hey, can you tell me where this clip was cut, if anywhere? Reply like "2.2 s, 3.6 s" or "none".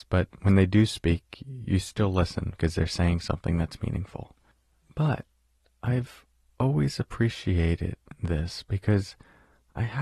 none